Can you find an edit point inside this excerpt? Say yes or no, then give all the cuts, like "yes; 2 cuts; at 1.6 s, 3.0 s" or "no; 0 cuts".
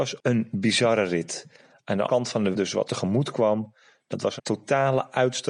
yes; 4 cuts; at 2.1 s, 2.5 s, 2.8 s, 4.4 s